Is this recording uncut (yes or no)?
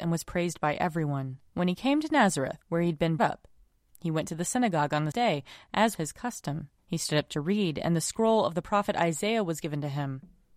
no